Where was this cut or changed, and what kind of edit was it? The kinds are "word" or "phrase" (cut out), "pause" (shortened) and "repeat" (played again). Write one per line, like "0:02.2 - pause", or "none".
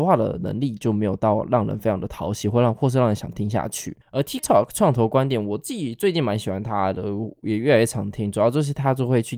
0:04.0 - pause
0:04.4 - word